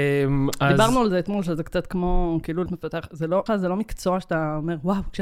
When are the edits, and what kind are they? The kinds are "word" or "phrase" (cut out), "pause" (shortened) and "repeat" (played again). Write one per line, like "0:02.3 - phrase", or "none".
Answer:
0:02.7 - word
0:03.5 - word